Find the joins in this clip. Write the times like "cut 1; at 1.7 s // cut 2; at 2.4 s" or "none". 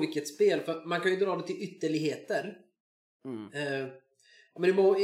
none